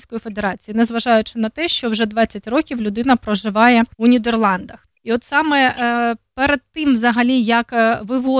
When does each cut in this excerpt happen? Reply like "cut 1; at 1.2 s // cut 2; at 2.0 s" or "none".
cut 1; at 3.9 s // cut 2; at 4.9 s